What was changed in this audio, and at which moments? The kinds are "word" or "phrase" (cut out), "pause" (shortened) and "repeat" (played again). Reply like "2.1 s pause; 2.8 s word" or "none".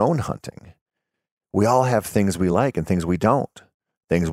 none